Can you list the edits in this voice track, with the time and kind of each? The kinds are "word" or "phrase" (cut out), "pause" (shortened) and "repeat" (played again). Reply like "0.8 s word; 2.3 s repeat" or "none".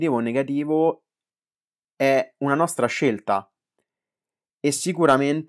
none